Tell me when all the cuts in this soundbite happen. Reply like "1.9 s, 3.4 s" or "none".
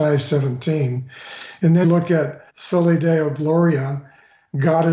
1.8 s, 2.5 s